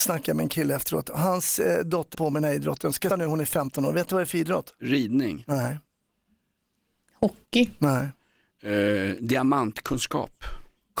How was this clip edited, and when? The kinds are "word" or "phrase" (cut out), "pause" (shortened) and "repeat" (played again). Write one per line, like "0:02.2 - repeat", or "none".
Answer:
0:02.1 - word
0:03.1 - word